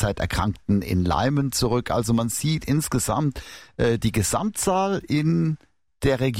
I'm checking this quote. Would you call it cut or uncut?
uncut